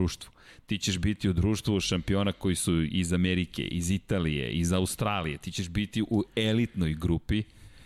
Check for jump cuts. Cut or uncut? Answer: uncut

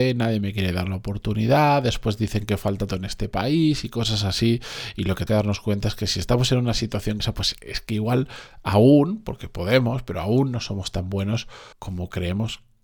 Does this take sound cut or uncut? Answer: cut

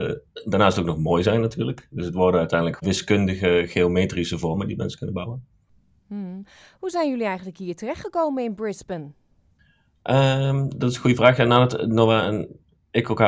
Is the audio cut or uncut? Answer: cut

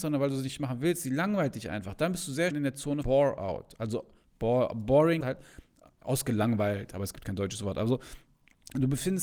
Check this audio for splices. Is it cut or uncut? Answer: cut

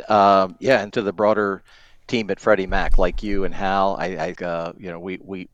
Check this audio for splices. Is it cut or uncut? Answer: cut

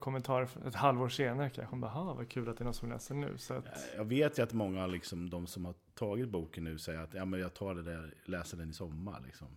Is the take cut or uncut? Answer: uncut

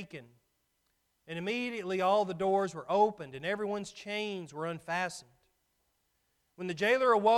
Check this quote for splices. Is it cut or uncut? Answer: uncut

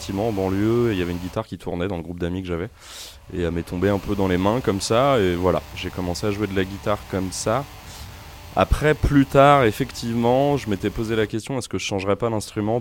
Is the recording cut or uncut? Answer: uncut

